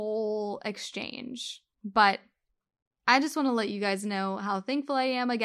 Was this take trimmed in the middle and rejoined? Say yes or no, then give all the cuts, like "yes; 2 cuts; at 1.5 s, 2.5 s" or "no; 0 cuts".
yes; 1 cut; at 1.7 s